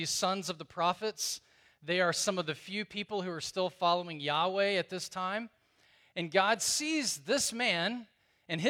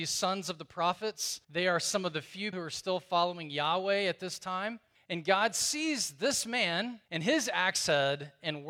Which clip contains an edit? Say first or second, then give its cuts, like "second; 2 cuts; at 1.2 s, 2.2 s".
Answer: second; 4 cuts; at 1.4 s, 2.5 s, 4.9 s, 7.1 s